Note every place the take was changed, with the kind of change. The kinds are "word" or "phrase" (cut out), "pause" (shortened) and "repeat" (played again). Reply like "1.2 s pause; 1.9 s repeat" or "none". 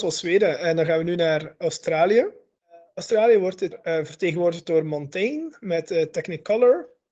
3.7 s word